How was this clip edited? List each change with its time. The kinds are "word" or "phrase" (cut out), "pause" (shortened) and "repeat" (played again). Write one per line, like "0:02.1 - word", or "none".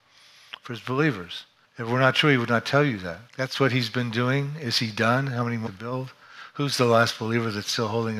0:01.6 - pause
0:03.3 - pause
0:05.7 - phrase